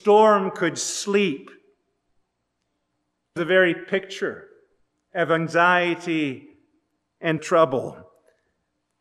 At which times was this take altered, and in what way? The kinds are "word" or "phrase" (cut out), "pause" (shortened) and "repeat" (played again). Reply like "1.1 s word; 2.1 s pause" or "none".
3.4 s word; 7.4 s word